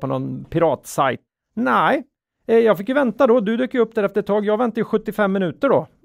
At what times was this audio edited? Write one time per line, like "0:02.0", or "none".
0:01.3